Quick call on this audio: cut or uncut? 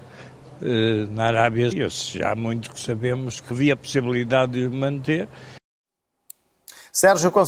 cut